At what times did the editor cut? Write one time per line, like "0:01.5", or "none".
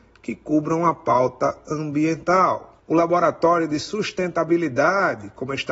none